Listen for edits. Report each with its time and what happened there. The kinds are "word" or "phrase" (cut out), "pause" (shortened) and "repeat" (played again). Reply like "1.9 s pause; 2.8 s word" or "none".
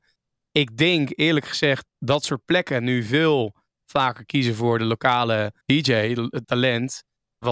1.9 s word; 5.6 s pause; 6.4 s word

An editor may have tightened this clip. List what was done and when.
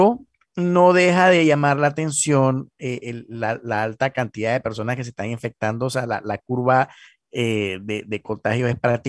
none

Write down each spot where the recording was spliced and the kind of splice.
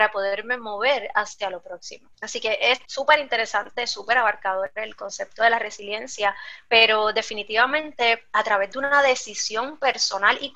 2.1 s pause; 2.8 s pause

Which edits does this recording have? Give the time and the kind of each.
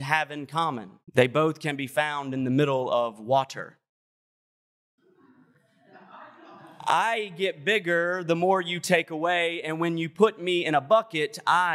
1.0 s pause

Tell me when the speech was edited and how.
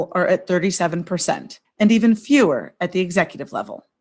1.6 s pause

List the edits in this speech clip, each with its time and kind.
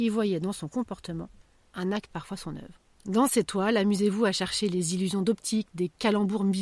2.1 s phrase

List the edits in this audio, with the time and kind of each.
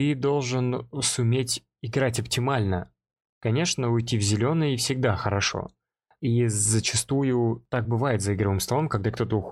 none

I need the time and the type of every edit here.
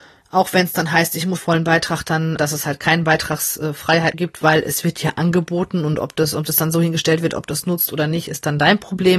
1.4 s word; 2.4 s word; 4.1 s word

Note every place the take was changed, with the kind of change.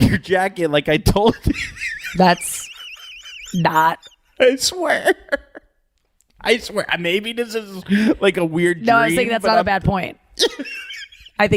none

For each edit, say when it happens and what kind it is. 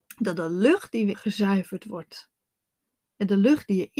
1.1 s word

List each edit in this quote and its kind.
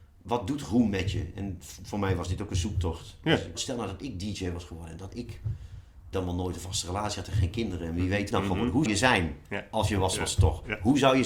3.5 s word; 6.1 s phrase; 8.3 s phrase; 8.9 s word

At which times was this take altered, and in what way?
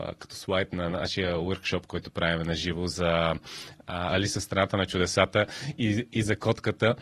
none

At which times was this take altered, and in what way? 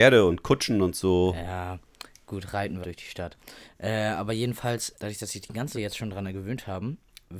2.8 s word; 4.9 s word; 5.7 s word

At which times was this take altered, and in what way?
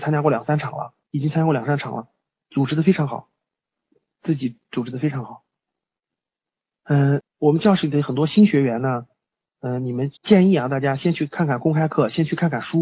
1.0 s pause; 7.2 s word; 10.2 s pause

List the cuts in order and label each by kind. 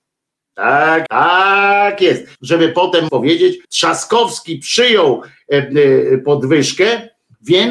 1.1 s word; 2.3 s pause; 3.1 s word; 3.6 s pause

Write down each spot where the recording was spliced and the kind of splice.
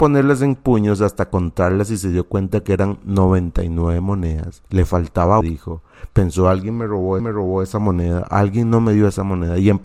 4.7 s pause; 5.4 s word; 7.2 s repeat

